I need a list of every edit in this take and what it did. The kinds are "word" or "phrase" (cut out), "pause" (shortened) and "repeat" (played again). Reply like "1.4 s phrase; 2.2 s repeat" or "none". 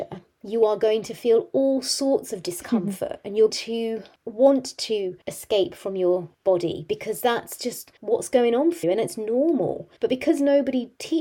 3.5 s word; 5.2 s pause; 6.3 s pause; 8.0 s pause; 8.8 s word; 10.0 s pause